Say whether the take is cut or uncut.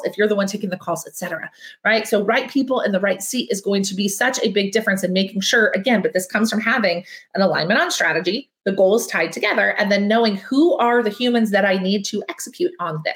uncut